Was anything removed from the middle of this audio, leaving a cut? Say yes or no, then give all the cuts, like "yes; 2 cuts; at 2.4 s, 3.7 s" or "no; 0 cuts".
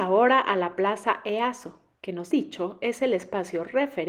yes; 1 cut; at 2.3 s